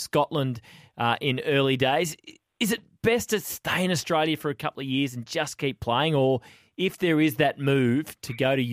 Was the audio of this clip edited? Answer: no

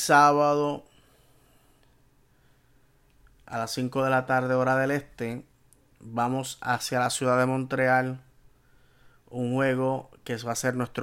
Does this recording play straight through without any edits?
yes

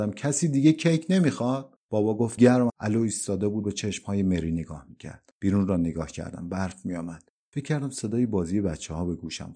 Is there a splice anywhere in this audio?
yes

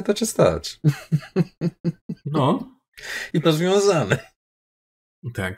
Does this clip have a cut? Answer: yes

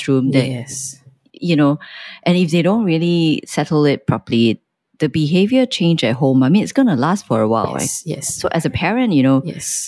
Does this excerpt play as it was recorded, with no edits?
yes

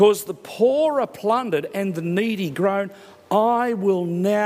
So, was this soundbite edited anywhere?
no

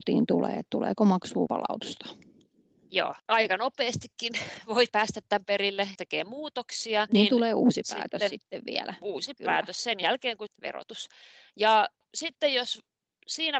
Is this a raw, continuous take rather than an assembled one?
no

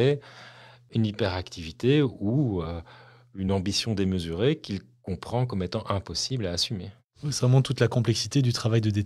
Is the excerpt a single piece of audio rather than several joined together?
yes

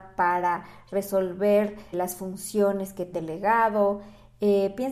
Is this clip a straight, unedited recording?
no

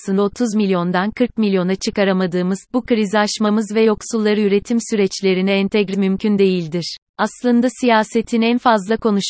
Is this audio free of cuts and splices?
no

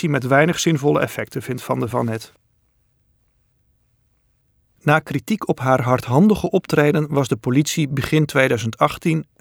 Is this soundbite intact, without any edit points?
yes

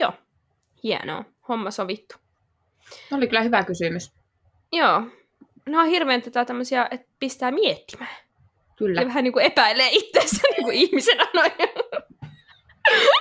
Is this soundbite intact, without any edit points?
yes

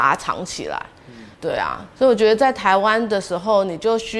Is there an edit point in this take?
yes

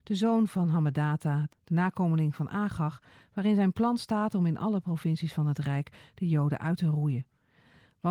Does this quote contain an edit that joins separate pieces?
no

